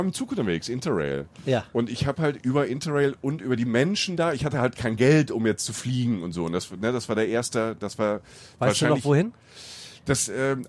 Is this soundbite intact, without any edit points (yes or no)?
yes